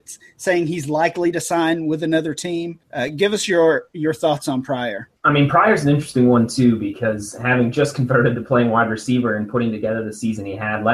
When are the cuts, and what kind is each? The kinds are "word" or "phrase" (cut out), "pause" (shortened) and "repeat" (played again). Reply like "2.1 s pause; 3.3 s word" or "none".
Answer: 2.8 s pause; 5.2 s pause